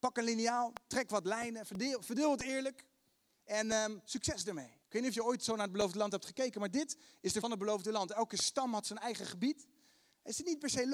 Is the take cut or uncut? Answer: cut